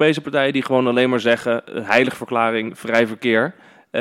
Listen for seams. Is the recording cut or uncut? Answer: uncut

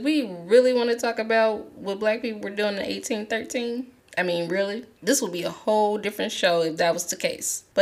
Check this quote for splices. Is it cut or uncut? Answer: uncut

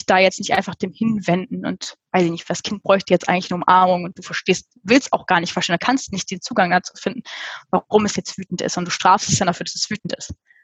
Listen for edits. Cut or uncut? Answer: uncut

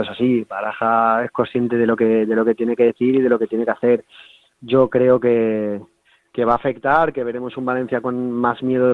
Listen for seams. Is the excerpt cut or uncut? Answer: uncut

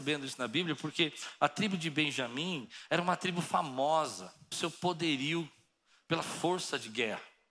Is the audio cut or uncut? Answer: cut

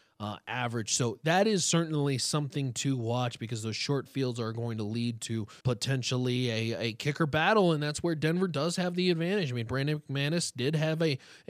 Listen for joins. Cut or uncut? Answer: cut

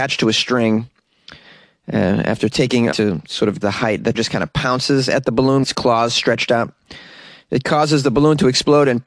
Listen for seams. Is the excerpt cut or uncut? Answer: cut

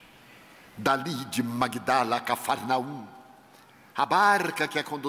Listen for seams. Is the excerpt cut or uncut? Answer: uncut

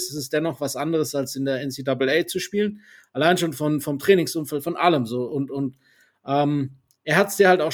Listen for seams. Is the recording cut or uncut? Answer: uncut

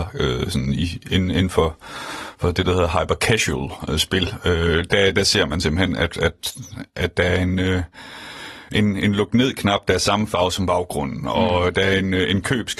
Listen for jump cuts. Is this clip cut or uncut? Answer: uncut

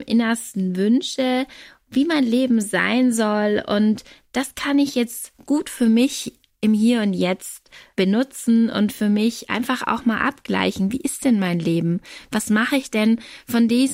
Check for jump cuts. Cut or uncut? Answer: uncut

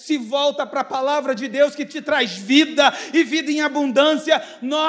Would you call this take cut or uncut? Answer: uncut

